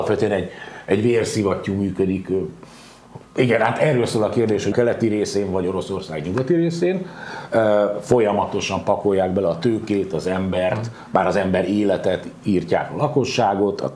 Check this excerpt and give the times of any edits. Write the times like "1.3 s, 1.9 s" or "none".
4.7 s